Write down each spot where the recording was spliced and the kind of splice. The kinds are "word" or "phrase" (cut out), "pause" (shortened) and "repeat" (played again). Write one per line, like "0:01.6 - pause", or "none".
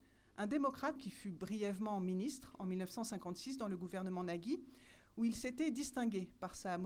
0:01.0 - word